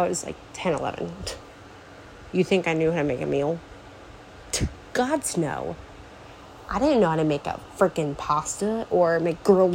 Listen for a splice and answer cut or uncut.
uncut